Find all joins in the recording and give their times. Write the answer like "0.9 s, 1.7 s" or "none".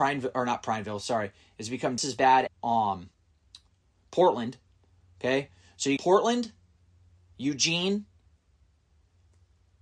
2.0 s, 2.5 s, 6.0 s